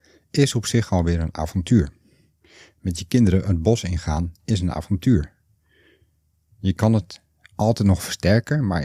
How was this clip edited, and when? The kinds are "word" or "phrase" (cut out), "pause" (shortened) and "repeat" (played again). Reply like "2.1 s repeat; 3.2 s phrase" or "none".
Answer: none